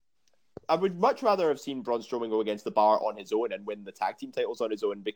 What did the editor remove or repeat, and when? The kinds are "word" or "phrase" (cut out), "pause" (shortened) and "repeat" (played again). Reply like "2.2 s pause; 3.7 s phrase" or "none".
none